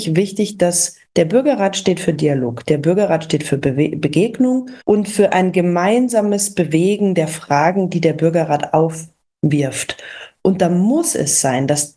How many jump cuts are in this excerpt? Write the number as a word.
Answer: one